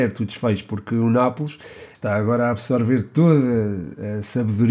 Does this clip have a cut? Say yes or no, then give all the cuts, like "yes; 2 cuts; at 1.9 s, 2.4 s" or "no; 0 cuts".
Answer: no; 0 cuts